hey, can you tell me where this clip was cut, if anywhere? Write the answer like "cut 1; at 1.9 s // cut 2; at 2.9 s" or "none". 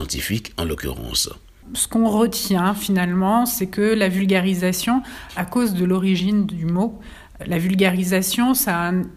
cut 1; at 5.3 s // cut 2; at 7.4 s